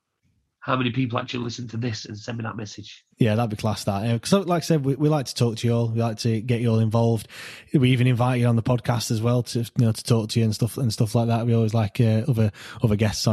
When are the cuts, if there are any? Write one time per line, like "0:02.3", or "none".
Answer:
0:03.1